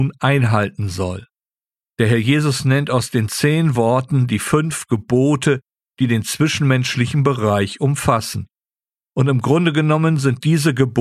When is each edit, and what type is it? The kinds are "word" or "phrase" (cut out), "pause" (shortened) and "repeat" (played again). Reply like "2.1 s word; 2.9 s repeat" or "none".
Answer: none